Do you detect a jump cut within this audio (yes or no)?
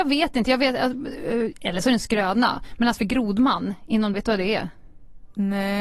yes